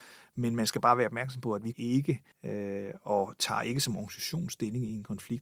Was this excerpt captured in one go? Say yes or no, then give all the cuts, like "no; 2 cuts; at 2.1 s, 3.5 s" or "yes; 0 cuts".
no; 2 cuts; at 1.7 s, 2.3 s